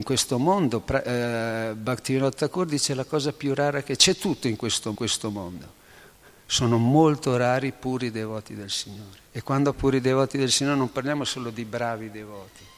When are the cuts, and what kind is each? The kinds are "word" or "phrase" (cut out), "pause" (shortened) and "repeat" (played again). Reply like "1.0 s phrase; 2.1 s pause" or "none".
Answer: 4.0 s word; 4.9 s repeat; 9.3 s pause; 9.7 s phrase